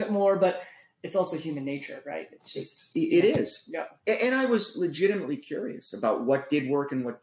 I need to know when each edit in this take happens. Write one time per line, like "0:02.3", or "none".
none